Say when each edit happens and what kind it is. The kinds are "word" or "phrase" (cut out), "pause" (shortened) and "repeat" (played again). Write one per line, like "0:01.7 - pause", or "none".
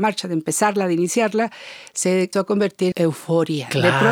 0:02.3 - word
0:02.9 - word